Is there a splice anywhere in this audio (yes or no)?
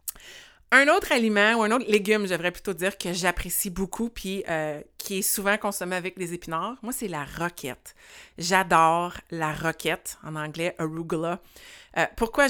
no